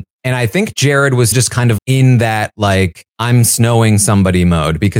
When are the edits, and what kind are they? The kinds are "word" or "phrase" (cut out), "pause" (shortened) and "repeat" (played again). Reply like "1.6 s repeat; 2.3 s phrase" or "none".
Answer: 1.3 s word; 1.8 s word; 3.1 s pause